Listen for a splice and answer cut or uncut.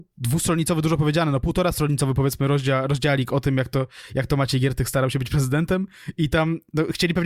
uncut